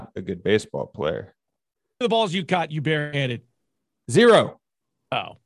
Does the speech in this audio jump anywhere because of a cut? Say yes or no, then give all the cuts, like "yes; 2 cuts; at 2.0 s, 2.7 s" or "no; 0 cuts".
yes; 1 cut; at 2.0 s